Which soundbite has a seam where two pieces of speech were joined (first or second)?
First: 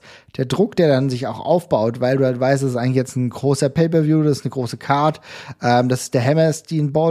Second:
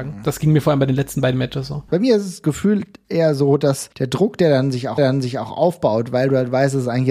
second